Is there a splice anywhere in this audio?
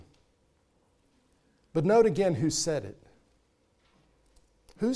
no; 0 cuts

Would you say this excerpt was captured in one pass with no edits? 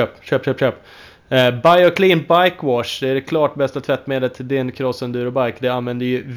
yes; 0 cuts

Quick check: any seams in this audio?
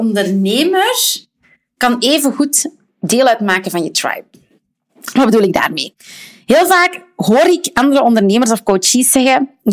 no; 0 cuts

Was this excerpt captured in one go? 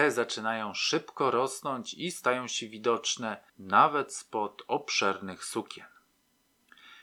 no; 1 cut; at 3.5 s

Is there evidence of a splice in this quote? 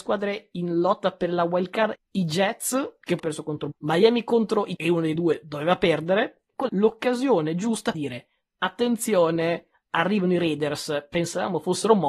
yes; 6 cuts; at 1.9 s, 3.2 s, 3.7 s, 4.8 s, 6.7 s, 7.9 s

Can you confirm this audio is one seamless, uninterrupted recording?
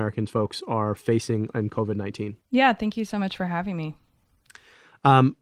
no; 1 cut; at 2.4 s

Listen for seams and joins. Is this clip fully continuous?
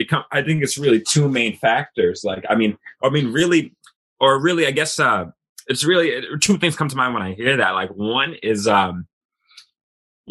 yes; 0 cuts

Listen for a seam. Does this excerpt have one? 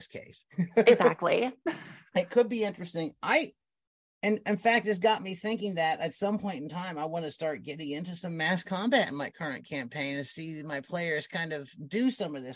no; 0 cuts

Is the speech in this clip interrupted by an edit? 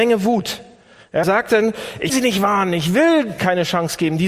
yes; 3 cuts; at 1.2 s, 2.1 s, 3.4 s

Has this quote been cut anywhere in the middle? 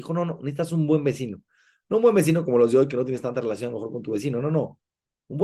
no; 0 cuts

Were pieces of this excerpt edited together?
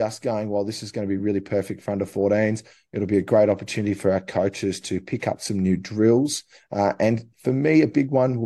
no; 0 cuts

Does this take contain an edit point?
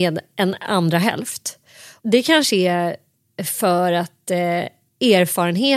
no; 0 cuts

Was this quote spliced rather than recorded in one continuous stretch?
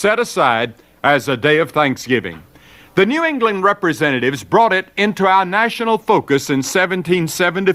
no; 0 cuts

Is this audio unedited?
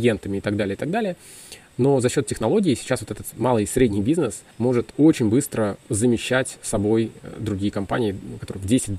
no; 1 cut; at 4.5 s

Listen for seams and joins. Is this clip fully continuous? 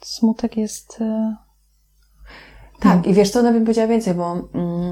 yes; 0 cuts

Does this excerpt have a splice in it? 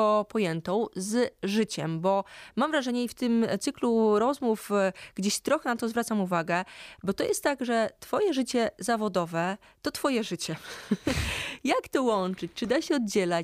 no; 0 cuts

